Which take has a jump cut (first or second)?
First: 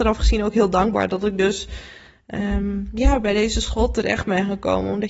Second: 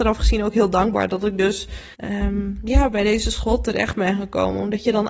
second